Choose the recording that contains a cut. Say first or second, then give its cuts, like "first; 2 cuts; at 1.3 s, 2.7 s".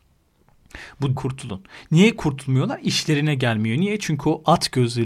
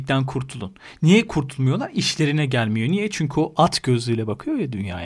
first; 1 cut; at 1.2 s